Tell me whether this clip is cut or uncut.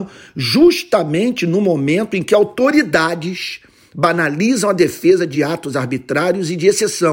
uncut